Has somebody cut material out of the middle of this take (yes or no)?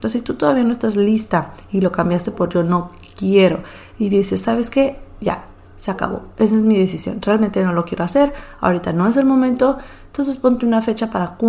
no